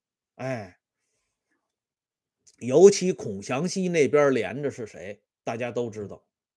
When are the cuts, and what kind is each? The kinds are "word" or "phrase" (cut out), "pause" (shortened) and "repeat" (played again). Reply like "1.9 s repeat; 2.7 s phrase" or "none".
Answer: none